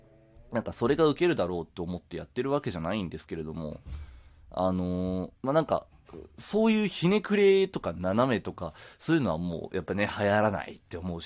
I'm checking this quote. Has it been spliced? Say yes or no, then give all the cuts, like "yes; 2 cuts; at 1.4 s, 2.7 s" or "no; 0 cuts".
yes; 1 cut; at 5.4 s